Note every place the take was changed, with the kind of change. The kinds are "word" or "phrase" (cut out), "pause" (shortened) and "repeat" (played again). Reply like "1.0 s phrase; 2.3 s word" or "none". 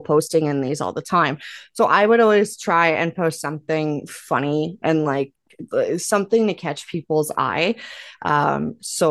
none